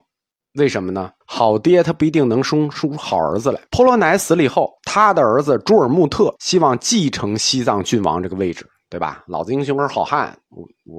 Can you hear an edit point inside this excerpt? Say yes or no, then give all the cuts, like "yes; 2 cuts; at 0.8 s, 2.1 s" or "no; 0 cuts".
yes; 4 cuts; at 1.2 s, 3.7 s, 4.8 s, 6.4 s